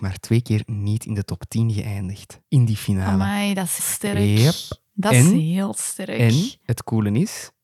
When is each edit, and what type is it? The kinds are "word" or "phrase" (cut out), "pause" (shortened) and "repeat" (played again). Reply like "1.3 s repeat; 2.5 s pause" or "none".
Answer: 3.8 s word